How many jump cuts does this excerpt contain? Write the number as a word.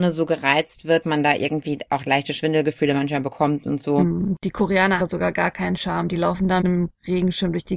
three